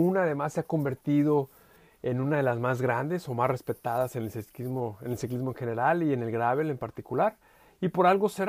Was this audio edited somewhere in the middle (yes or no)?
no